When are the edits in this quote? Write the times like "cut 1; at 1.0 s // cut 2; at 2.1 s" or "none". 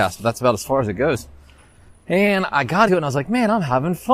cut 1; at 2.9 s